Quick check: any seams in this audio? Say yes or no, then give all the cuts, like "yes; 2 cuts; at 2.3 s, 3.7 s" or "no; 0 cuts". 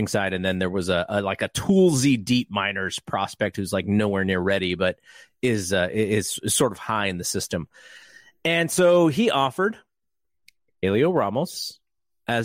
no; 0 cuts